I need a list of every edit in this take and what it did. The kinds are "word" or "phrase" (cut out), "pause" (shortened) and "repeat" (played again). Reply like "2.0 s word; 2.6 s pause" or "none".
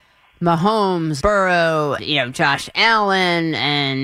1.2 s word; 2.0 s word